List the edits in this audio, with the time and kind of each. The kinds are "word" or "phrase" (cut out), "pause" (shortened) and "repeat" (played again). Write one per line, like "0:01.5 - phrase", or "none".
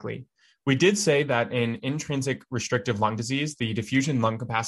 none